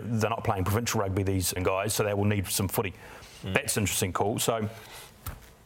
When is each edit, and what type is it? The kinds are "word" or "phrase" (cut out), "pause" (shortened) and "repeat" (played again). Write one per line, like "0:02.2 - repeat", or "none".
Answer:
0:01.6 - word